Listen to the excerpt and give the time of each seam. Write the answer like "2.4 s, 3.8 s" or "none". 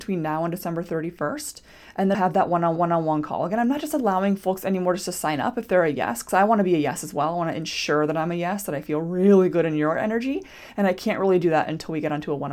2.1 s, 2.8 s